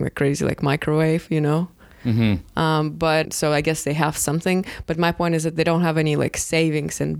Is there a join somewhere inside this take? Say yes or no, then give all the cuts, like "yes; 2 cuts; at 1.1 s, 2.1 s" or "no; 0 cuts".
yes; 1 cut; at 3.2 s